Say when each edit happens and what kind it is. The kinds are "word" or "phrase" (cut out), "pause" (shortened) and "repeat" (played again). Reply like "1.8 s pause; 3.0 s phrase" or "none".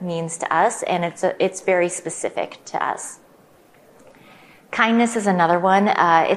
none

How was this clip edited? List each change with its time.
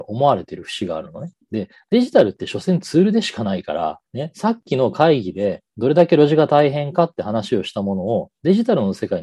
1.4 s pause; 4.1 s pause

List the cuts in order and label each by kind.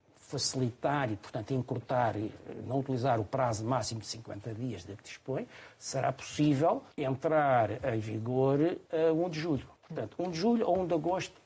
6.9 s pause; 8.9 s pause; 9.8 s pause

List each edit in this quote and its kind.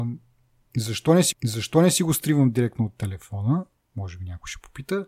1.3 s repeat

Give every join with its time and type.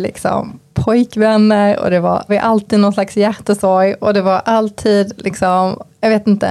2.3 s word

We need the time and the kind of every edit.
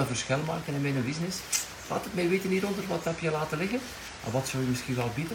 none

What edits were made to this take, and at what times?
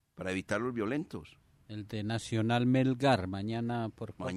none

